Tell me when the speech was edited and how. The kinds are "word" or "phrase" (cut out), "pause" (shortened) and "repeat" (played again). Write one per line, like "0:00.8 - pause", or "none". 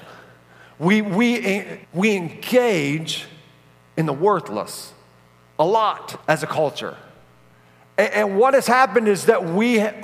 0:01.8 - pause
0:06.2 - pause

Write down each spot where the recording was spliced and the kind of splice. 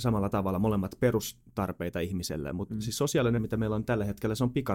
0:03.4 - word

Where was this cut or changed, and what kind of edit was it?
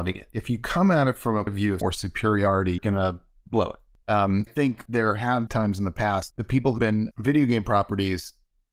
0:01.5 - word
0:01.8 - word
0:02.8 - word
0:04.5 - word
0:04.9 - word
0:05.5 - word
0:06.3 - word
0:06.8 - word
0:07.1 - word

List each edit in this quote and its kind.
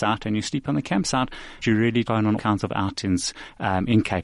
0:01.6 - word
0:02.0 - word
0:02.4 - word

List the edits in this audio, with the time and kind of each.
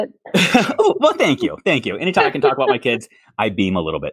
none

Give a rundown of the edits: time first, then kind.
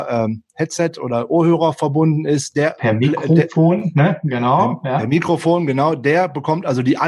none

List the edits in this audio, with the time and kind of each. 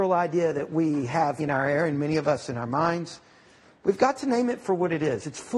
0:01.4 - word

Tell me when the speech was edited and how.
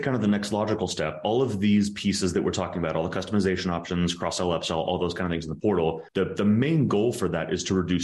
0:06.1 - pause

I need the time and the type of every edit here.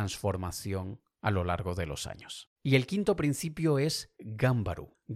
0:02.6 - pause

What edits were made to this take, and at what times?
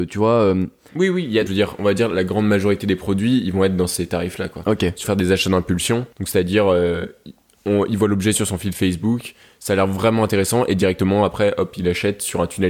0:01.5 - phrase
0:05.0 - phrase
0:06.1 - pause

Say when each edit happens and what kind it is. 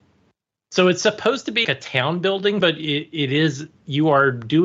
0:01.6 - word
0:02.6 - word

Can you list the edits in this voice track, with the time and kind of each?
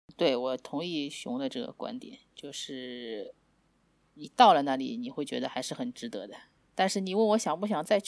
none

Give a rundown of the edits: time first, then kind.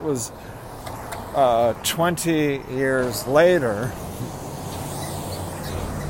none

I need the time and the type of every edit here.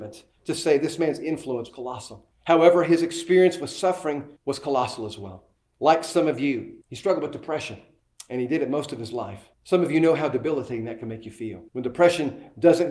0:01.7 - word
0:04.4 - pause
0:06.8 - pause
0:09.5 - pause
0:11.7 - pause

